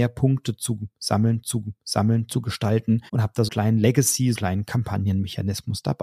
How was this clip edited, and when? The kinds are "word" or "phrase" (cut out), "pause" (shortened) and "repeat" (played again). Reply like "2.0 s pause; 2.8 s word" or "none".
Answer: 1.4 s repeat; 3.1 s pause; 3.5 s word; 4.3 s word

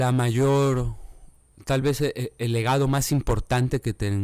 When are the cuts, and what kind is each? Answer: none

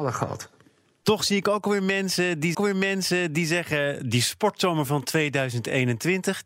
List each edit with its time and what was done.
2.5 s repeat

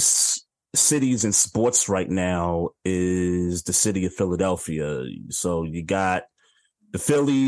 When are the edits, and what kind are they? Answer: none

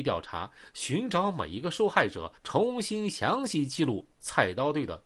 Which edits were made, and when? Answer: 2.4 s pause

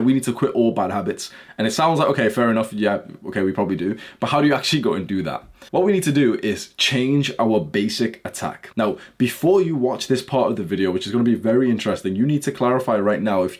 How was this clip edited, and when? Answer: 5.7 s pause; 8.7 s pause

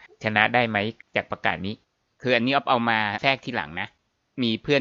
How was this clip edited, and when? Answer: 1.8 s pause

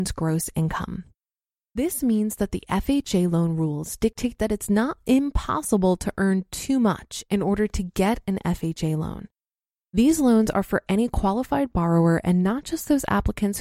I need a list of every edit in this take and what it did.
none

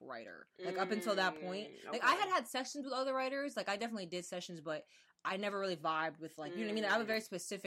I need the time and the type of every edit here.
none

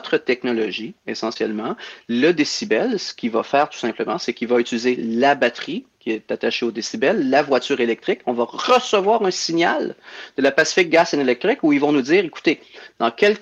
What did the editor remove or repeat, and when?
1.0 s pause

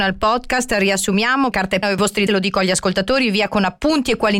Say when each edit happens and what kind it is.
1.5 s word; 1.8 s word; 2.3 s word

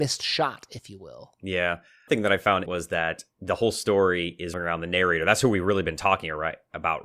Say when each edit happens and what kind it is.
2.1 s word; 2.7 s word; 4.5 s word

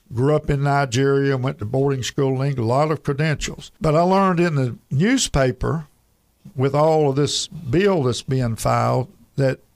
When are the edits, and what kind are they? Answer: 3.8 s pause

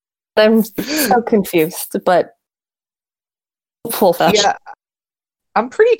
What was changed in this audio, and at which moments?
4.2 s word

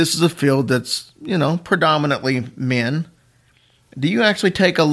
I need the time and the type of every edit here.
none

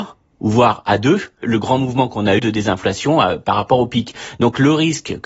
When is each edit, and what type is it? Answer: 1.4 s word; 2.4 s word

